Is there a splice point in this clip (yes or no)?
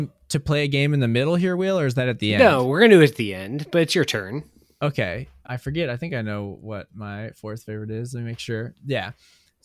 yes